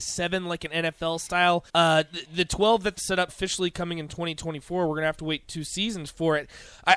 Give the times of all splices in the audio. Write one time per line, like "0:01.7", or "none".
0:01.7
0:03.0
0:03.3